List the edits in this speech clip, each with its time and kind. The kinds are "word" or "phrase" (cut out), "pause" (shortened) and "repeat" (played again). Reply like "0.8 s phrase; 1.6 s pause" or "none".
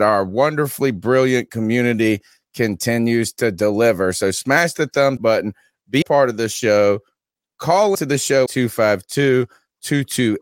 5.2 s word; 6.0 s word; 7.9 s word; 8.5 s word

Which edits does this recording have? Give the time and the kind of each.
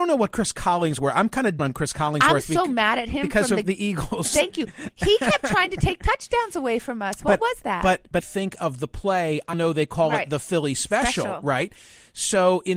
1.6 s word; 8.2 s phrase; 9.5 s word

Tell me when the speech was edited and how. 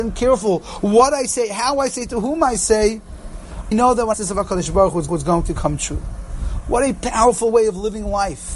3.7 s word; 4.1 s phrase; 5.1 s repeat

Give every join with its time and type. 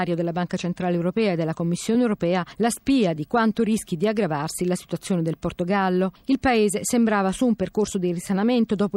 none

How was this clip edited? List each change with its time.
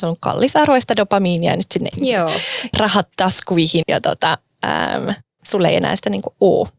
1.9 s word; 2.7 s word; 3.8 s word

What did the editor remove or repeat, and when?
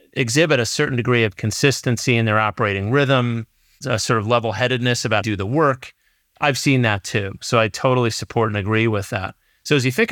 1.3 s word; 5.2 s phrase

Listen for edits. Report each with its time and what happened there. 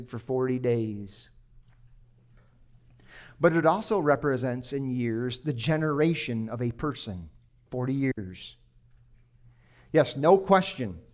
none

